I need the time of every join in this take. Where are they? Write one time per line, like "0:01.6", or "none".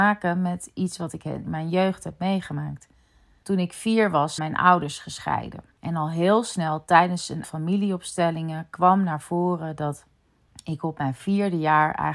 0:04.4
0:05.7
0:07.4